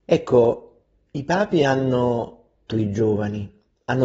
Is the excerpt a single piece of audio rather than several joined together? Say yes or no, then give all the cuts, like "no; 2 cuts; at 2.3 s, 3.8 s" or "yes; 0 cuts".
no; 1 cut; at 2.7 s